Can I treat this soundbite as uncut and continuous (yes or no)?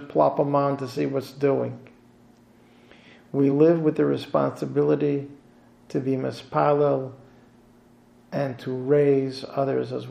yes